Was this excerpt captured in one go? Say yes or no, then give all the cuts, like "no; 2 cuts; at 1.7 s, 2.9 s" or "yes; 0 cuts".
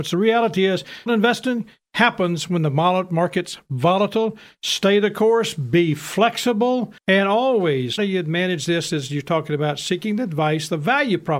no; 3 cuts; at 1.1 s, 7.0 s, 8.0 s